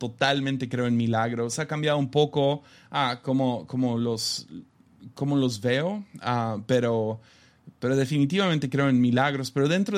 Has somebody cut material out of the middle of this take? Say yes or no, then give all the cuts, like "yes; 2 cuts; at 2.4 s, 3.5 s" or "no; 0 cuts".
no; 0 cuts